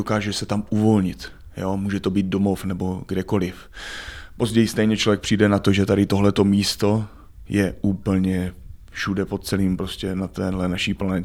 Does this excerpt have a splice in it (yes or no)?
no